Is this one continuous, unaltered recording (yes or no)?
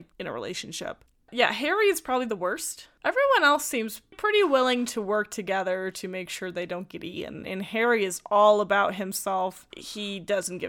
yes